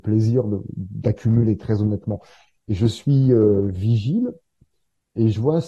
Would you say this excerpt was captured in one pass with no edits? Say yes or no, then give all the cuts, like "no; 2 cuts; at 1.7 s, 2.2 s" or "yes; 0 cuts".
yes; 0 cuts